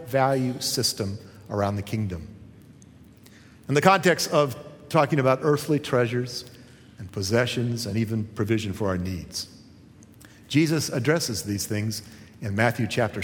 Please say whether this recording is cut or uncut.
uncut